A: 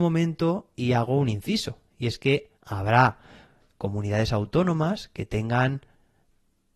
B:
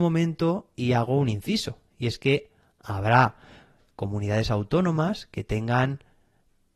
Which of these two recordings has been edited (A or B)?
A